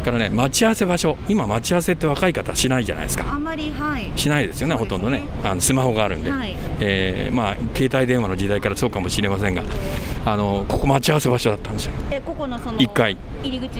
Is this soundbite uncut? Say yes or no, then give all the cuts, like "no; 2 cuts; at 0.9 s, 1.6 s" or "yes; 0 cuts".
yes; 0 cuts